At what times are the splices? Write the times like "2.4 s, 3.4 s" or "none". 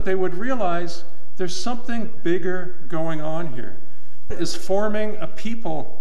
4.3 s